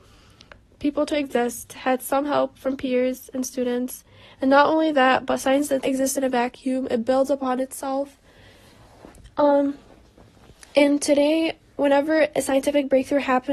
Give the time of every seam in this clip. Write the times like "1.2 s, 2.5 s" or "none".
5.8 s